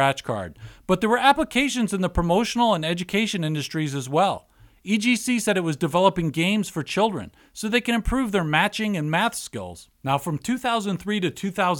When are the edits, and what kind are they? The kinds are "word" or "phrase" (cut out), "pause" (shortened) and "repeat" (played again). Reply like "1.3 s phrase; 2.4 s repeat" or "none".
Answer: 9.9 s pause